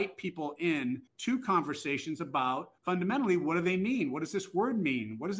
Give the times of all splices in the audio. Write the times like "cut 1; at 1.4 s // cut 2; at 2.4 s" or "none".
cut 1; at 1.1 s // cut 2; at 2.8 s